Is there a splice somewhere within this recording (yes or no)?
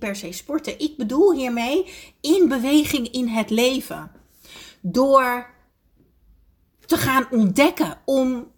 no